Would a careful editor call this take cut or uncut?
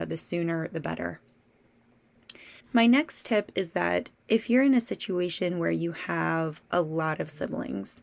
cut